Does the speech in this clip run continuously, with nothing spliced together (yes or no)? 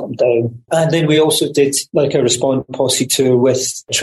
yes